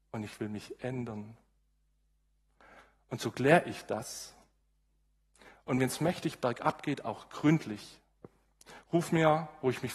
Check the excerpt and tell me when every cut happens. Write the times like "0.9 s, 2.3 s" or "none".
none